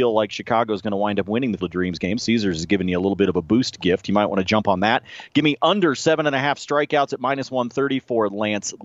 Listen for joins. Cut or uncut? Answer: cut